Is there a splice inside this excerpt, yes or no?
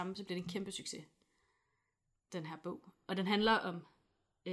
no